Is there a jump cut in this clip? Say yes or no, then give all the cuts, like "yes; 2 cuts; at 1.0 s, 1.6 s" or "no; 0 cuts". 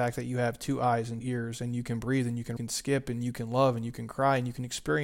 yes; 2 cuts; at 1.2 s, 2.6 s